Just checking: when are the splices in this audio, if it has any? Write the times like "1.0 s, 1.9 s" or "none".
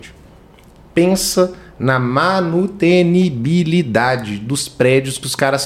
none

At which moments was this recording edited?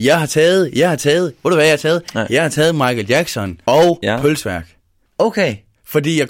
3.6 s

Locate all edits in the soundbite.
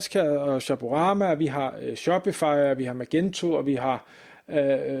none

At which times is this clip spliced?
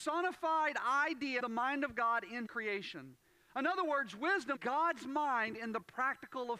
1.4 s, 2.5 s, 4.6 s

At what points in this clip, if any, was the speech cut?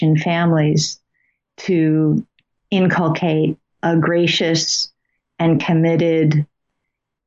3.8 s

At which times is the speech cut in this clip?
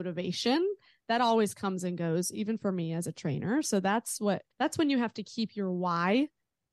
4.5 s

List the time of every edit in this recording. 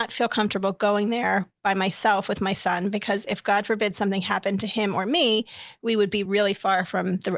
none

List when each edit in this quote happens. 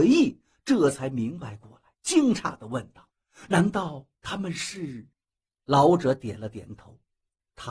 1.9 s, 3.1 s, 5.1 s

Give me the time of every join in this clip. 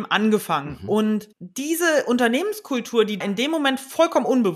1.3 s, 3.2 s

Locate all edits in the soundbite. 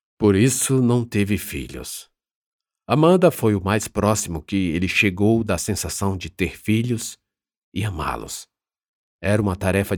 none

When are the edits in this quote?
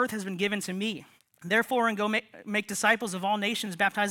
1.2 s

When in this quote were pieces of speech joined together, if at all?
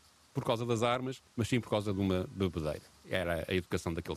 3.0 s

